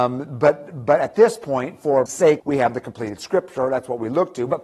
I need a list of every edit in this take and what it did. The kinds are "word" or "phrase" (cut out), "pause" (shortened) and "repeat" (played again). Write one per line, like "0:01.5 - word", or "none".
0:02.1 - word
0:02.4 - word